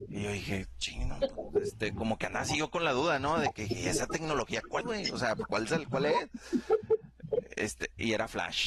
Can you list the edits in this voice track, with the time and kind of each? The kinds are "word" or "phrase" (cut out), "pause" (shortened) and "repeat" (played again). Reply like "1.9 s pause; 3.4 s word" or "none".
4.8 s word